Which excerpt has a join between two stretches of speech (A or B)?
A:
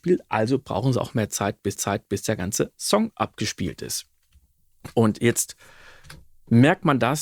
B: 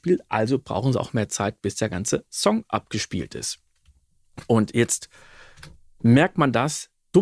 A